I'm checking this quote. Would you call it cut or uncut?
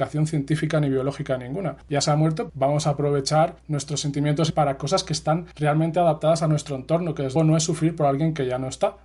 cut